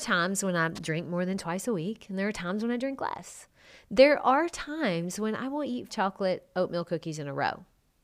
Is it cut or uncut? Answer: cut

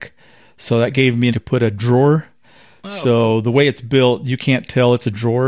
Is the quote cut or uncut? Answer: cut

